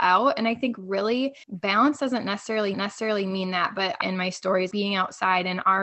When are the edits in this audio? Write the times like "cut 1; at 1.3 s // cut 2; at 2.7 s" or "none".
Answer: cut 1; at 1.4 s // cut 2; at 2.7 s // cut 3; at 4.0 s // cut 4; at 4.7 s